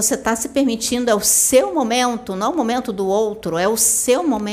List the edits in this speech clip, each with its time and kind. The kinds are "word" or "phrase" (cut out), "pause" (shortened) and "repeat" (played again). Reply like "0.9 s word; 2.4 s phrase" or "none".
none